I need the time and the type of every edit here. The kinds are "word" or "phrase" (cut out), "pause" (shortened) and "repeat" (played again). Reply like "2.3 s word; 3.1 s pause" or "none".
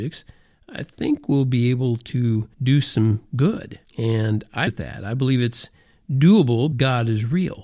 2.5 s pause; 3.8 s pause; 4.7 s word; 6.7 s word